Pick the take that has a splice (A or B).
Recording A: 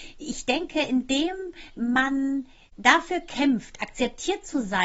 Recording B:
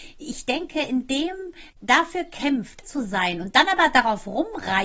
B